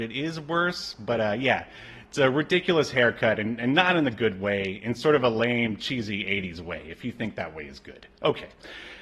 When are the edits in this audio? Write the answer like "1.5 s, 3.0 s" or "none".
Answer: none